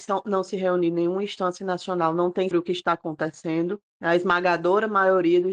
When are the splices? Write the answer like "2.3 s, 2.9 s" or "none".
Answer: 2.5 s